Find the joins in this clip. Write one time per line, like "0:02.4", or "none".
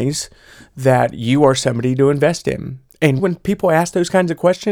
0:03.2